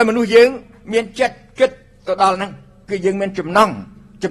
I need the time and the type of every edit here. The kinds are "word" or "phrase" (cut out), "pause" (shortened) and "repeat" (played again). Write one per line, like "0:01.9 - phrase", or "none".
none

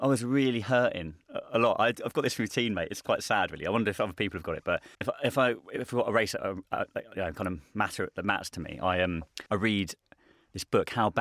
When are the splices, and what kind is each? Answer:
0:04.9 - pause
0:09.5 - pause

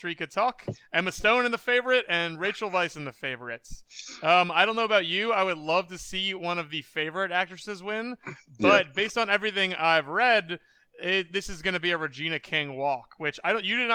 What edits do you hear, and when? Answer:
none

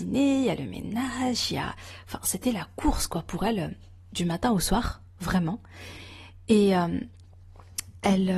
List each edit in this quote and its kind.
none

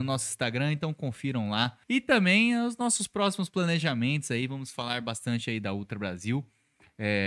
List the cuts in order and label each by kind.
0:01.8 - pause

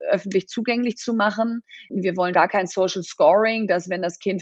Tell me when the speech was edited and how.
0:02.3 - word

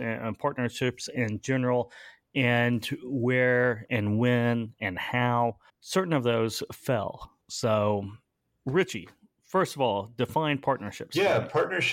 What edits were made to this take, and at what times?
0:05.7 - pause
0:07.4 - pause

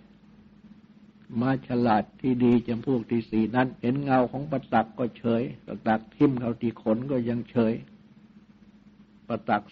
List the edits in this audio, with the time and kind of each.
0:02.2 - pause
0:03.8 - pause
0:05.6 - pause

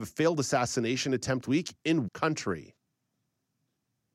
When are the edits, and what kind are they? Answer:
0:01.4 - word
0:02.1 - word

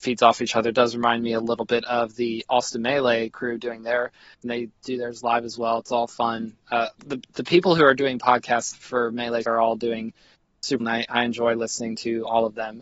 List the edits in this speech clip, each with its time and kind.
0:04.4 - word
0:06.9 - pause
0:08.7 - word
0:09.4 - phrase
0:10.8 - word

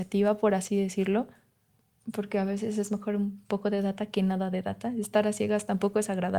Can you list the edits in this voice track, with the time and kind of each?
0:01.7 - pause

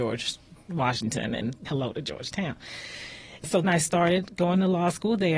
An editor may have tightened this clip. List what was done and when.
0:01.7 - word
0:03.6 - word

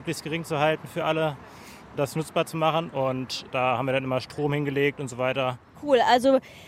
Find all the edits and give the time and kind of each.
none

